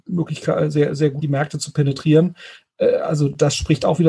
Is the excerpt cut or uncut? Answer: cut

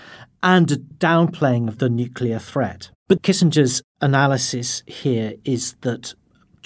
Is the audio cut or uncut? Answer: cut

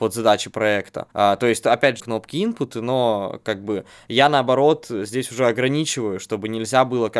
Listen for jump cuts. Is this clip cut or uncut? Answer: cut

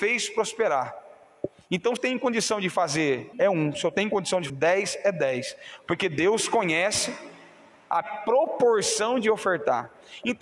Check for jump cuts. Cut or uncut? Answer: cut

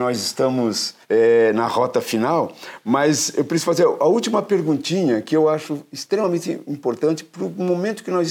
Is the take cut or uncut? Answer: cut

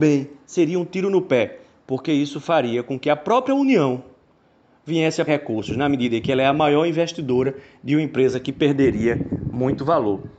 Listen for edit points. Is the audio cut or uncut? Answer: cut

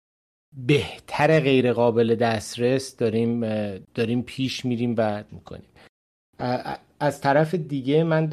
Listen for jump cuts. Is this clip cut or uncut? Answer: cut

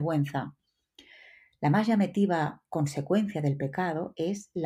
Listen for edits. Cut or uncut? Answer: uncut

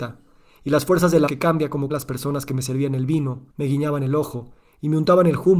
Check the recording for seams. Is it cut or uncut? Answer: cut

